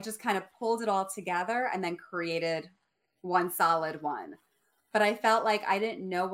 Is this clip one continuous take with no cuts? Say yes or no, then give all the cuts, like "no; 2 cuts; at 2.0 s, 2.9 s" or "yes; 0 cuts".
yes; 0 cuts